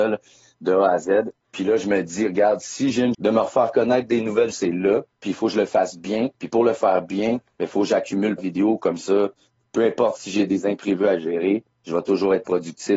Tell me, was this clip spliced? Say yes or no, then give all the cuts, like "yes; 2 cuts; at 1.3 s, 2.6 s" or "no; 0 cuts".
yes; 6 cuts; at 1.4 s, 3.1 s, 4.5 s, 5.1 s, 6.3 s, 8.4 s